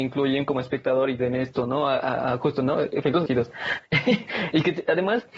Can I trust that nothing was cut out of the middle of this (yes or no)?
no